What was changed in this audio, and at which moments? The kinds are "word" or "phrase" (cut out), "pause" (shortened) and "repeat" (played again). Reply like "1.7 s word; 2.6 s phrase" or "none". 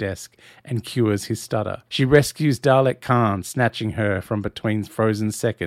1.9 s pause